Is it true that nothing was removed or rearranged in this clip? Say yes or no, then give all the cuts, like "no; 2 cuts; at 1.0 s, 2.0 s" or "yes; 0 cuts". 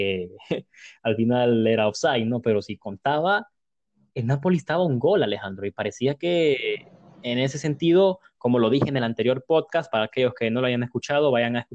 yes; 0 cuts